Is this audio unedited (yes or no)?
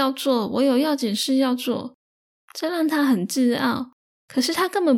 yes